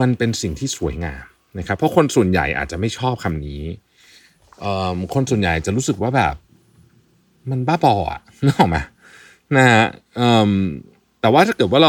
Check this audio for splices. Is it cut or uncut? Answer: uncut